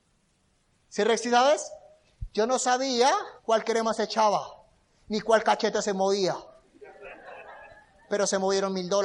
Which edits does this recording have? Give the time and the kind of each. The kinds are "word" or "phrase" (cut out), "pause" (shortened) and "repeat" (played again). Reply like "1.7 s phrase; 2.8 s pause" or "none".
3.4 s pause